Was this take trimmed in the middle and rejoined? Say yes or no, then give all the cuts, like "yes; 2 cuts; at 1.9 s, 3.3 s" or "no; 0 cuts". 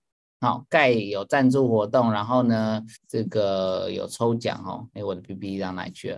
yes; 1 cut; at 3.0 s